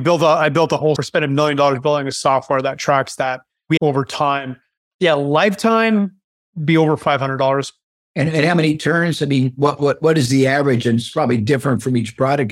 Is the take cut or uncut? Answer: cut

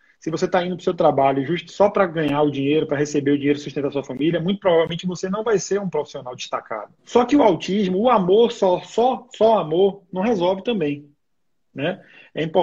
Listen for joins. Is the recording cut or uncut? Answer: cut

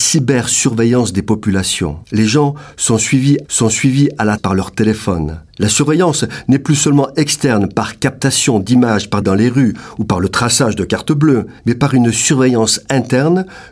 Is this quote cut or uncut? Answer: cut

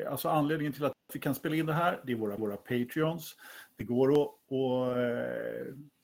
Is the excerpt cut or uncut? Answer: cut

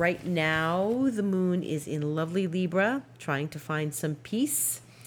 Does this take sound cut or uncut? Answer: uncut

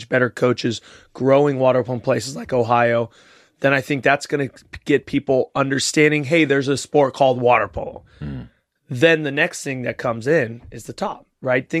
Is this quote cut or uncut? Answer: uncut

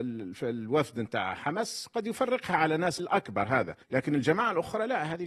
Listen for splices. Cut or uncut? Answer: cut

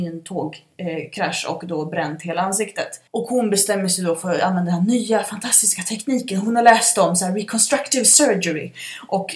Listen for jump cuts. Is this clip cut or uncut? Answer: cut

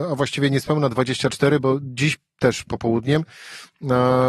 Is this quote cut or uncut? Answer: cut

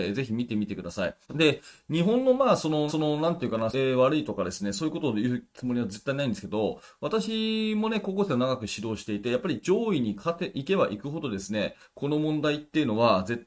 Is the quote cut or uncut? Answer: cut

